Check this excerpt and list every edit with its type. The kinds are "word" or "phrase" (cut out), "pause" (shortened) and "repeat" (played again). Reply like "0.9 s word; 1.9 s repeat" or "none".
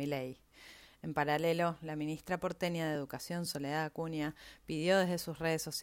none